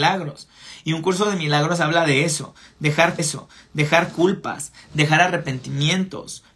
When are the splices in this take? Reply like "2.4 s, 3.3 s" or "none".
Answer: 3.2 s